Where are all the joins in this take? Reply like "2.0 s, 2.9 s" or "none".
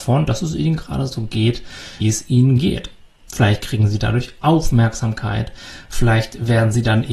2.0 s